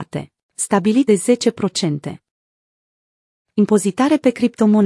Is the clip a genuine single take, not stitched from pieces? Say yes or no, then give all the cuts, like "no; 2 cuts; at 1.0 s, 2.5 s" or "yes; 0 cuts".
no; 1 cut; at 1.1 s